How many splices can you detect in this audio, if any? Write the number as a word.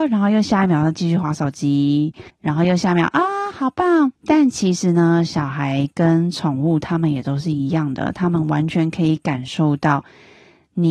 two